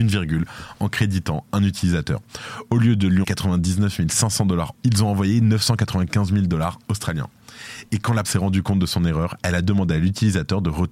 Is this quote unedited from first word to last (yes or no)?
no